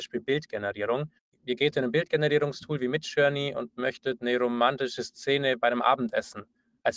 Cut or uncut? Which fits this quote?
uncut